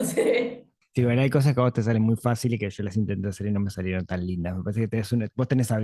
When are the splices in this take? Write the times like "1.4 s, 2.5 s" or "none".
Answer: none

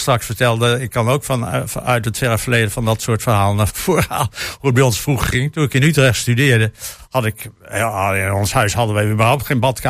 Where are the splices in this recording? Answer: 3.7 s

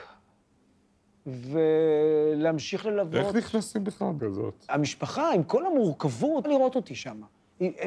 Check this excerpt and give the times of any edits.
4.2 s, 6.4 s

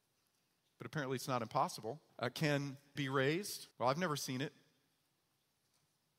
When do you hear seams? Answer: 2.1 s, 3.0 s, 3.7 s

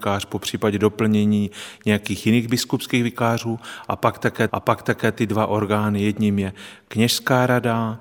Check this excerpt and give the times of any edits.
4.5 s

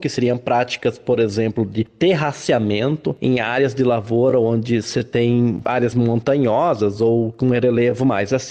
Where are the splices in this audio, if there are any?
5.9 s

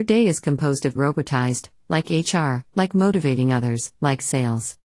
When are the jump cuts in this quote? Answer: 1.0 s, 2.7 s, 3.9 s

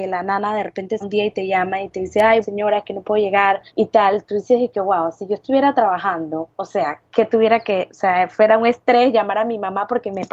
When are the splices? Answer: 1.0 s, 2.4 s, 3.7 s, 6.5 s

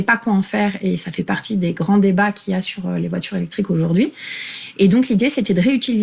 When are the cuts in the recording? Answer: none

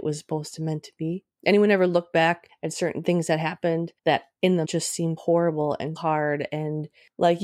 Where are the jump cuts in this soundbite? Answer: 4.0 s, 4.6 s, 5.2 s, 6.0 s

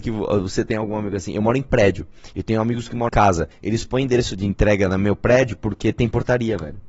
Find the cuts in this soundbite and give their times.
3.1 s, 3.5 s, 4.4 s

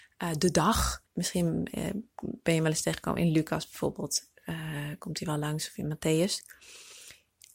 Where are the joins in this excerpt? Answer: 1.1 s

